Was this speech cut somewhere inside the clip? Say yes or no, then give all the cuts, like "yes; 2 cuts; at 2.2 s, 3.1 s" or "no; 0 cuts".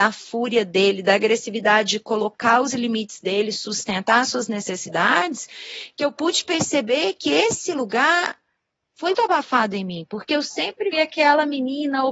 yes; 2 cuts; at 9.1 s, 10.9 s